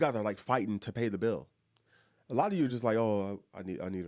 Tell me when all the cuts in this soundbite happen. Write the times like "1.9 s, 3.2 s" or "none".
none

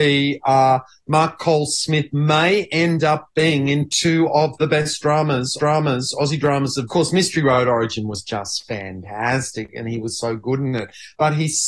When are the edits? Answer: 5.6 s, 6.9 s

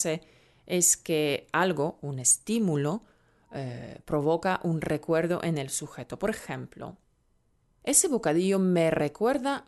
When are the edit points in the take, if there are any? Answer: none

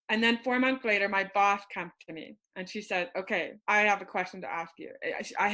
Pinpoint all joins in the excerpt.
2.4 s, 3.6 s

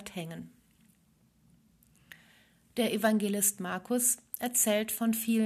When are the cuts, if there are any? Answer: none

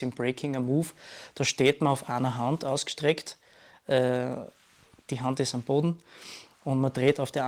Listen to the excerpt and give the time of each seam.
none

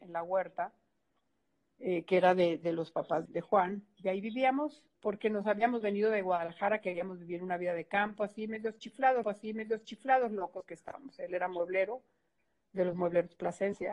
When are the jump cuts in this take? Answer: 3.2 s, 4.9 s, 9.2 s

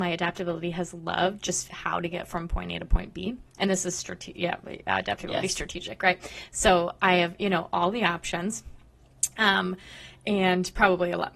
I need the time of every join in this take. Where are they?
1.7 s

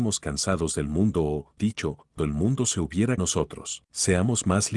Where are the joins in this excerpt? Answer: 1.6 s, 2.2 s, 3.2 s, 3.9 s

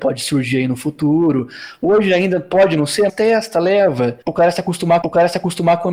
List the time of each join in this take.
3.1 s, 4.2 s, 5.0 s

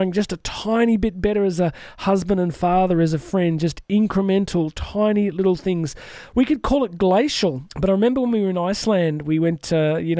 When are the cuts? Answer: 7.7 s

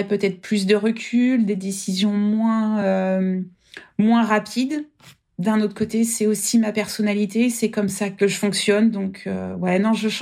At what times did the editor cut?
none

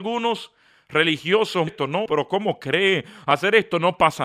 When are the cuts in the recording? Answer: 1.7 s, 2.1 s

